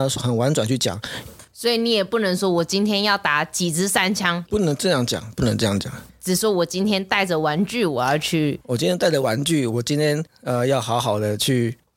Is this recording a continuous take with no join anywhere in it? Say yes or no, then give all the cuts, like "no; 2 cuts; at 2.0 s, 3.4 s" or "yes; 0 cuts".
no; 1 cut; at 4.5 s